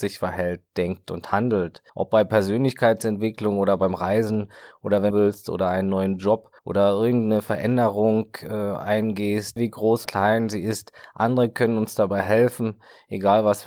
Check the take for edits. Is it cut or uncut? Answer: cut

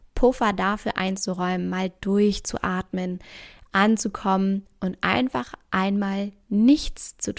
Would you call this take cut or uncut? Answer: uncut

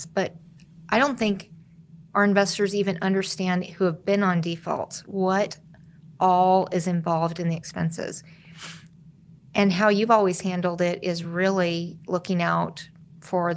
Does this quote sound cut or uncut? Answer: uncut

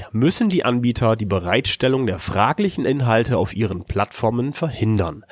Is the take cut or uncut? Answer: uncut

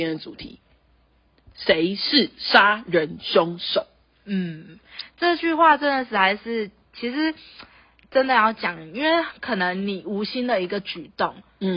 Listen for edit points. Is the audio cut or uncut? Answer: uncut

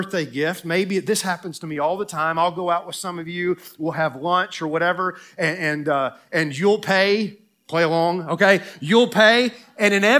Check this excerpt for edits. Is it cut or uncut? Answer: uncut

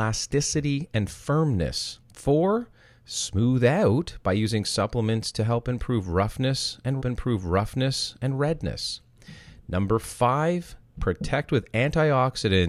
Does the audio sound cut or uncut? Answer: cut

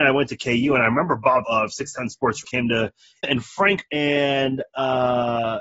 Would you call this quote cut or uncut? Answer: cut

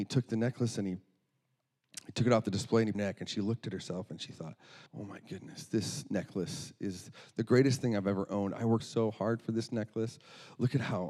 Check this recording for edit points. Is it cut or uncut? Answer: cut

